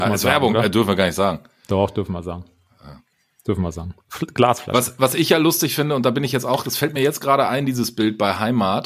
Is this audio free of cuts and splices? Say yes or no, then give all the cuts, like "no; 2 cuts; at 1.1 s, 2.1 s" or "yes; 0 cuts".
yes; 0 cuts